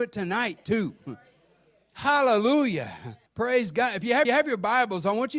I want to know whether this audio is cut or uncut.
cut